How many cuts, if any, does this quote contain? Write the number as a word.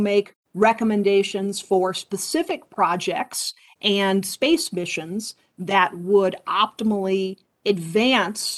zero